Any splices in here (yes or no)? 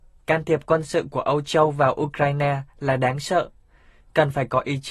no